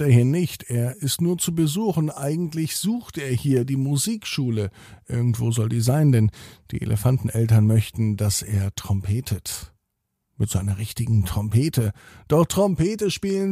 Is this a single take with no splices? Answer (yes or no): yes